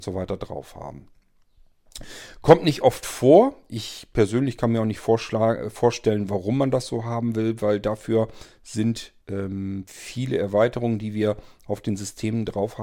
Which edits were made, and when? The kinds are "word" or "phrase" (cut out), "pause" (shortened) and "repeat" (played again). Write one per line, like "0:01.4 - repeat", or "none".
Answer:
0:09.2 - pause